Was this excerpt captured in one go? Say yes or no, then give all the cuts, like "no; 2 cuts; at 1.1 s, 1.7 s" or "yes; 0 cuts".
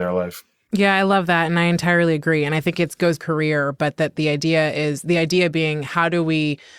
no; 1 cut; at 3.2 s